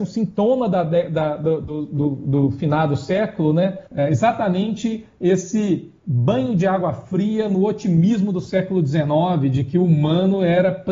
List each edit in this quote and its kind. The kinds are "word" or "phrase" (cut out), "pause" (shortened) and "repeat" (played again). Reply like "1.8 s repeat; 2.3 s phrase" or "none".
3.9 s pause; 6.0 s pause